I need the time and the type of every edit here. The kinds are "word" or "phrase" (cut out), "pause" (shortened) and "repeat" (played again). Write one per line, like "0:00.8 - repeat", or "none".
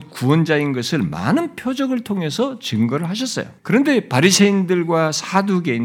0:03.6 - pause